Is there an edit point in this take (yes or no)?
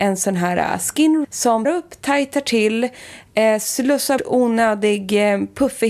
yes